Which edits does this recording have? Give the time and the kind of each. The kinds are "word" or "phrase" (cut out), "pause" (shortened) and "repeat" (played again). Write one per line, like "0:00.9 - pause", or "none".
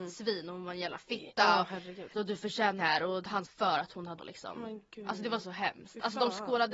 0:02.1 - word
0:02.8 - word
0:03.4 - word
0:04.2 - phrase